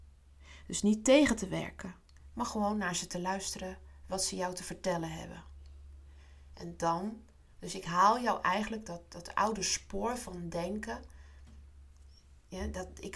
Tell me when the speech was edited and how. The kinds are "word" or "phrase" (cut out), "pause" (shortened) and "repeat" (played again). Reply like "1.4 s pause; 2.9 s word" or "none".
none